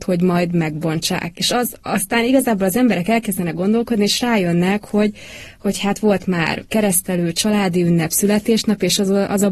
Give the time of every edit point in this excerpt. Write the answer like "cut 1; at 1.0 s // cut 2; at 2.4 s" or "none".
none